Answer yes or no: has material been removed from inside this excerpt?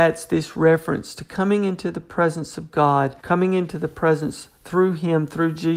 yes